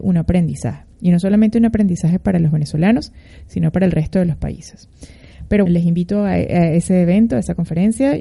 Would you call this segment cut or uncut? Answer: cut